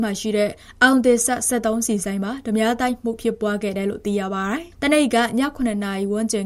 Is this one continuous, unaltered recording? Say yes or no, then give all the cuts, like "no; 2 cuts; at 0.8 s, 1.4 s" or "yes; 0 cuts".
no; 1 cut; at 4.7 s